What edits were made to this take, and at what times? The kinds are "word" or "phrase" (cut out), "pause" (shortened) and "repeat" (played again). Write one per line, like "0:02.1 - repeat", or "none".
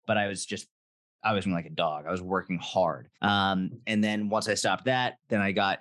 0:01.4 - word
0:03.1 - pause